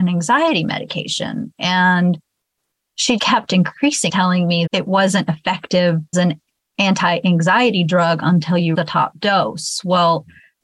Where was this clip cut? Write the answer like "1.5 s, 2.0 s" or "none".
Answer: 3.2 s, 4.1 s, 4.7 s, 6.1 s, 8.7 s